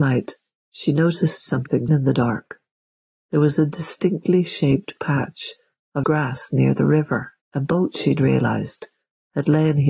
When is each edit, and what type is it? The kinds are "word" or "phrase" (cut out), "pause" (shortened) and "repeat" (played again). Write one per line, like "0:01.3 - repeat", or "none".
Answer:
0:01.9 - phrase
0:06.0 - word
0:07.4 - pause

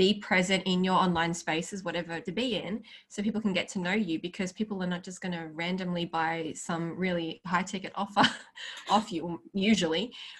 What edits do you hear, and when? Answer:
0:02.3 - phrase

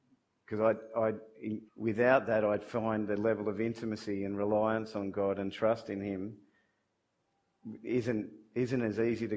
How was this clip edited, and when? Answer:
0:01.7 - pause

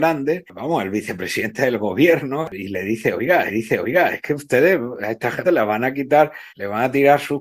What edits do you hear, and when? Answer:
0:03.5 - repeat
0:05.4 - phrase
0:06.5 - pause

